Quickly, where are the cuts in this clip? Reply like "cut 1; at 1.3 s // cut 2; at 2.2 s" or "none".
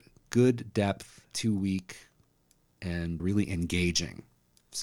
cut 1; at 1.3 s // cut 2; at 3.2 s